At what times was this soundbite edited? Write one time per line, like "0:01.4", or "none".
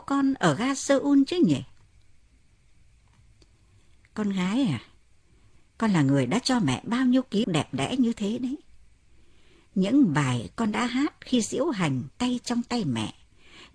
0:07.4
0:12.1